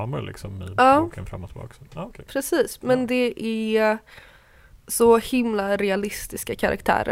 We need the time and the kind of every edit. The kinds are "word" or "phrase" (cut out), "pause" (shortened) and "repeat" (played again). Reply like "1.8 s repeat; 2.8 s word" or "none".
4.8 s pause